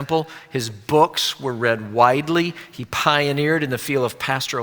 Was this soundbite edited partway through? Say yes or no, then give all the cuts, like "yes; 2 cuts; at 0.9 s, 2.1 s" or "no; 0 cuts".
no; 0 cuts